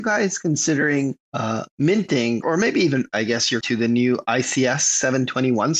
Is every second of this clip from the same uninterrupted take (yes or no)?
no